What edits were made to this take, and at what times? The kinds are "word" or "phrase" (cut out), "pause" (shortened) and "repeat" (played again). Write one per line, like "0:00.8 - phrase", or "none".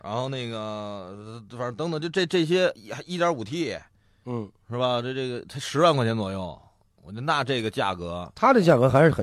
none